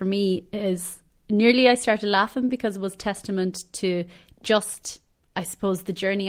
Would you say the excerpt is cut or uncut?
uncut